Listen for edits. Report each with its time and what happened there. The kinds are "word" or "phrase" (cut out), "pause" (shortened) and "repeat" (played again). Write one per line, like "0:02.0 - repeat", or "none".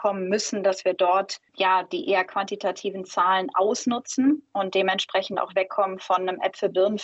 none

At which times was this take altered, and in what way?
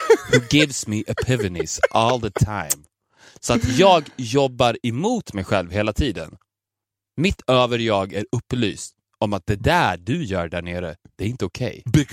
none

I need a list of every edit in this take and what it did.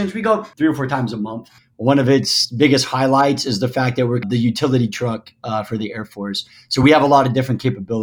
none

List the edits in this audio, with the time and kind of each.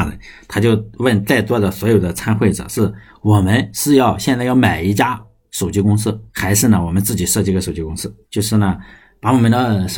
0:06.3 - pause
0:08.2 - pause

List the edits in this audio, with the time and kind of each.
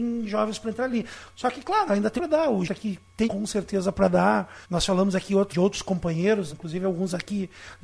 0:02.2 - word
0:02.6 - word
0:03.2 - word
0:04.6 - pause
0:05.5 - word
0:06.5 - word

